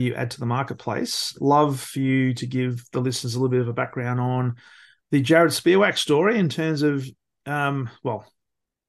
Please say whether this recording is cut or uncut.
uncut